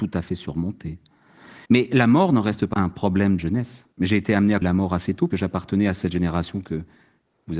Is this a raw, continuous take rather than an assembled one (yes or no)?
no